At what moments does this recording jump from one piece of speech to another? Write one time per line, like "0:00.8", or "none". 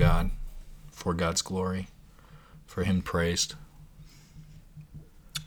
0:00.9
0:03.0